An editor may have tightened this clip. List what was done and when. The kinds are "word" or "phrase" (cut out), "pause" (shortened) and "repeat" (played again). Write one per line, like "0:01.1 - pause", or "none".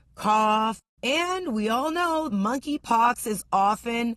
0:02.3 - word